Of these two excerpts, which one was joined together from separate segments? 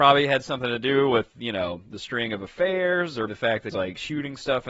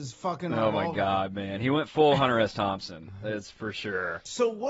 first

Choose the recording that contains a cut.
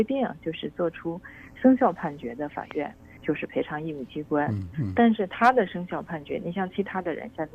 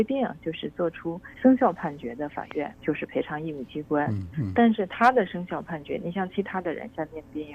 second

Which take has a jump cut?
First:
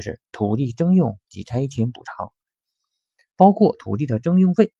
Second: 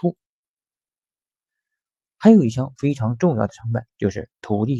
second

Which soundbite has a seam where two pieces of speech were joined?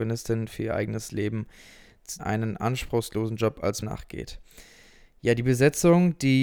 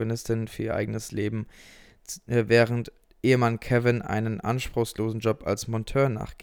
first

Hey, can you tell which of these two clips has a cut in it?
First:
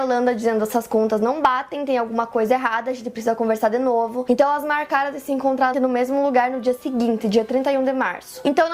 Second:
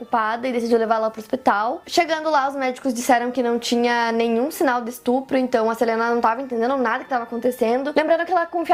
first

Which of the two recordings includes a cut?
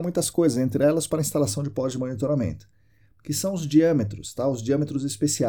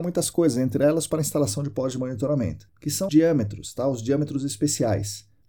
second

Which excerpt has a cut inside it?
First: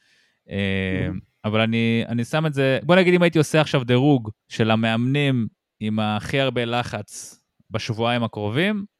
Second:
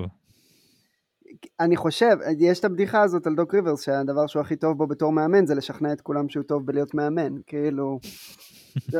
first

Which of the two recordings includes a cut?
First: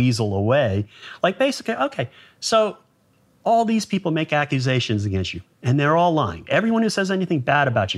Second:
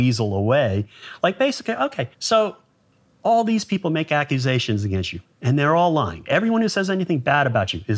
second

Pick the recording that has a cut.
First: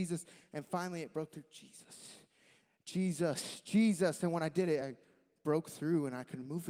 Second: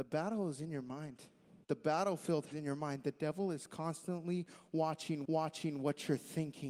second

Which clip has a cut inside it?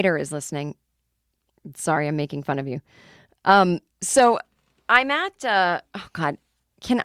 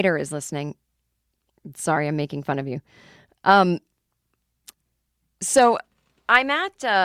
first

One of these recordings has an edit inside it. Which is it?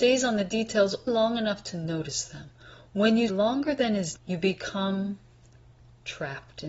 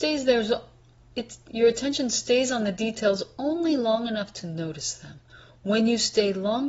first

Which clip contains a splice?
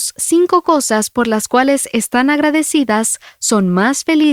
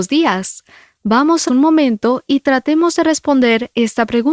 second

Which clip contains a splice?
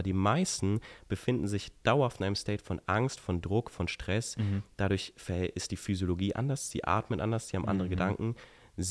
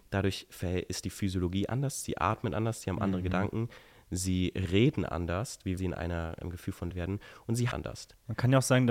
second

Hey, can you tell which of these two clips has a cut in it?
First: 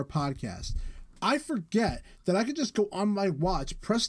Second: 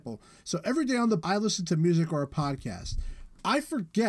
second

